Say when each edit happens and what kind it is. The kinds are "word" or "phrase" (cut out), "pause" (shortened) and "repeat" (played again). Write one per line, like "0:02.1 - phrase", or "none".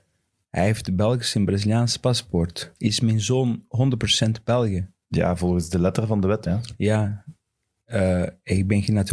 0:02.8 - pause
0:05.0 - pause
0:06.5 - word